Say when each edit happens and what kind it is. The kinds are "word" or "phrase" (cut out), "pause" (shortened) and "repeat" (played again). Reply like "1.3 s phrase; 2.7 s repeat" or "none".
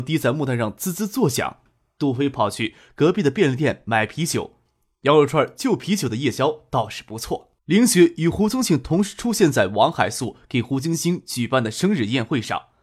7.6 s pause